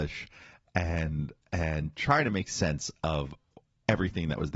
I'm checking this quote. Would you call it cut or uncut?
uncut